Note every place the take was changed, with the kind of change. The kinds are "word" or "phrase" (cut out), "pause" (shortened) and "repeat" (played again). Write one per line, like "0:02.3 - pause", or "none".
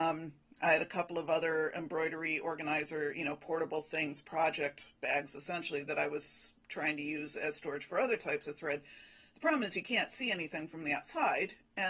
none